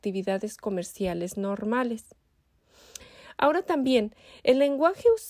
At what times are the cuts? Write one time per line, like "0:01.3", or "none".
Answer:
none